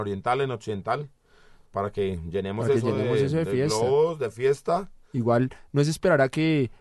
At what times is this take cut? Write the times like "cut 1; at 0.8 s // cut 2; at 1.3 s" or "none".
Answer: none